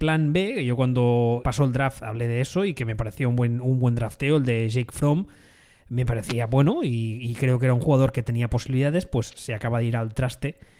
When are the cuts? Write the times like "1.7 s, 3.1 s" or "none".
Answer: 1.4 s